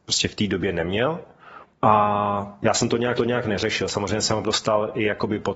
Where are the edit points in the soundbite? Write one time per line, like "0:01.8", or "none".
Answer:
0:01.7
0:03.2
0:04.4